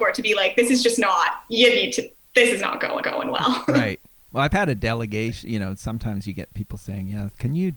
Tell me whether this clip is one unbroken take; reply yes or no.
no